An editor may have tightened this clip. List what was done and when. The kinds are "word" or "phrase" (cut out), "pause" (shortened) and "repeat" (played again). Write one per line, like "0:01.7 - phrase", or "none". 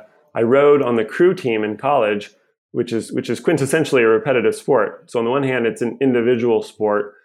none